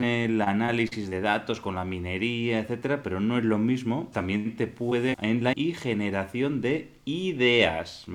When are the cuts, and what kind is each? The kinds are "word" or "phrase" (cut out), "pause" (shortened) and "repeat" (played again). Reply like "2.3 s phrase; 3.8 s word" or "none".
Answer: 4.1 s word; 5.1 s word; 5.5 s word